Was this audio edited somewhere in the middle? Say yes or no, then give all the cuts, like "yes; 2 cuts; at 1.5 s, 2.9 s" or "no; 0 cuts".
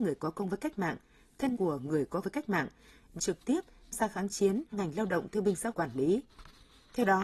yes; 6 cuts; at 1.5 s, 2.2 s, 3.2 s, 3.9 s, 4.7 s, 5.7 s